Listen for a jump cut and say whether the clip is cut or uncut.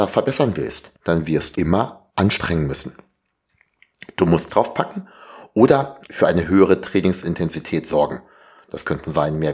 cut